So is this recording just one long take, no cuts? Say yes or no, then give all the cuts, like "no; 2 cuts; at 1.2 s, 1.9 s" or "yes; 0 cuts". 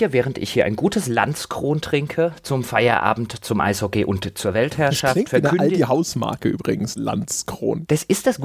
yes; 0 cuts